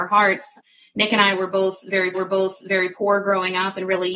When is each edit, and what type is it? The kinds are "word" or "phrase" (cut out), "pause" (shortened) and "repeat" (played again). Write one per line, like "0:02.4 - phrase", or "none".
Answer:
0:02.1 - repeat